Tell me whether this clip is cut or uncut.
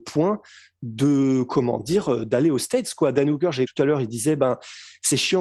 cut